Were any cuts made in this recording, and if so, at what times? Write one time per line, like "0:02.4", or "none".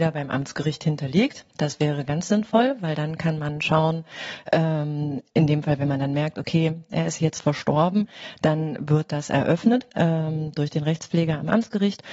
0:09.9